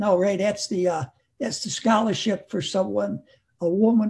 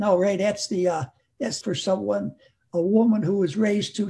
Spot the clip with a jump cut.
second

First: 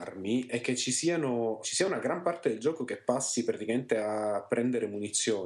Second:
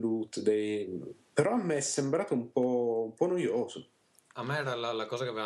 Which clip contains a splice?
first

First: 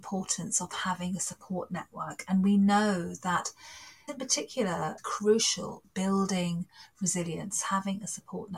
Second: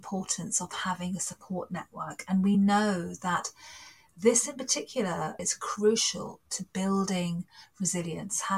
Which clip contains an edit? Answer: first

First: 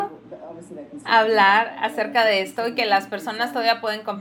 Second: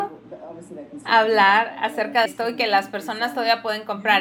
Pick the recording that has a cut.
second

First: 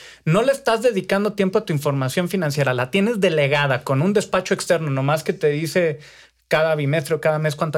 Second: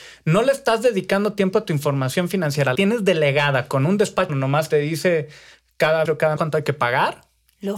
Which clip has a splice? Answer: second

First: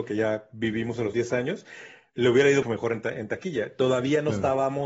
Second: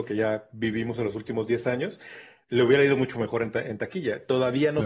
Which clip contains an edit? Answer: first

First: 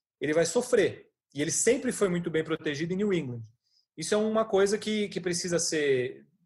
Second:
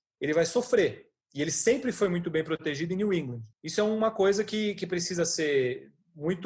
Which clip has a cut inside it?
second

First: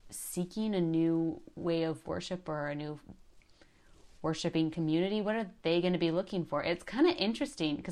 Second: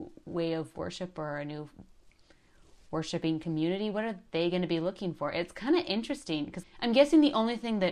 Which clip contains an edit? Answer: second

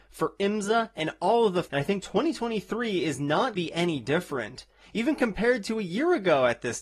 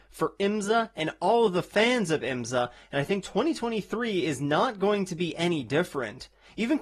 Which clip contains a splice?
first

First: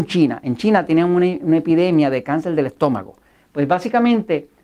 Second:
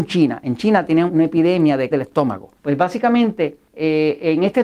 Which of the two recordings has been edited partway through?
second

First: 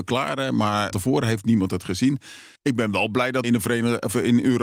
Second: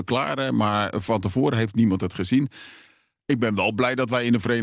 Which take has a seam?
first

